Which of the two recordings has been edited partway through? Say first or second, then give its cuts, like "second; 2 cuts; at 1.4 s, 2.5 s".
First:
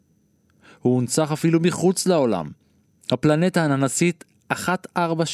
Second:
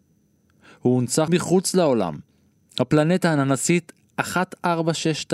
second; 1 cut; at 1.3 s